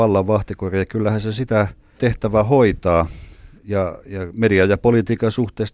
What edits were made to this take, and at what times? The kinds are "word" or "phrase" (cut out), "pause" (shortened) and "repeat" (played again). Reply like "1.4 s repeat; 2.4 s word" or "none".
2.0 s word; 3.6 s pause